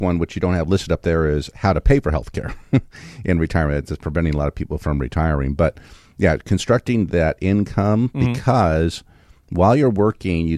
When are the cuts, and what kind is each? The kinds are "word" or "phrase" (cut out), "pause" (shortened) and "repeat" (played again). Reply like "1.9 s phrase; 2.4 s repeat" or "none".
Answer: none